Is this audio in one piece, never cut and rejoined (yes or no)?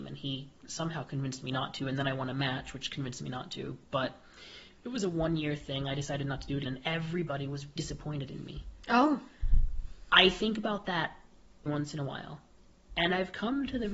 no